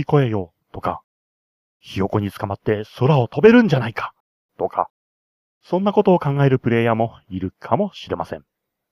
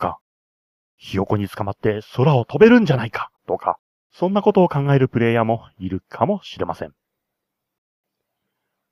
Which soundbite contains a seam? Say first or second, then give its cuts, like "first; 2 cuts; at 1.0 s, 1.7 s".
second; 2 cuts; at 3.4 s, 3.9 s